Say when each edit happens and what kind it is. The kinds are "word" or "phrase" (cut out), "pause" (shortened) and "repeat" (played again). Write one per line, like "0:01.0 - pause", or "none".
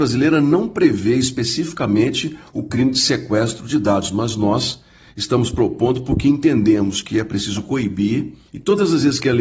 none